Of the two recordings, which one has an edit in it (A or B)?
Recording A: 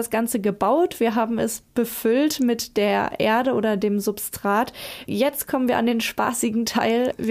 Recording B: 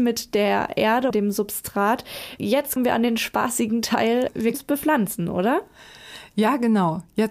B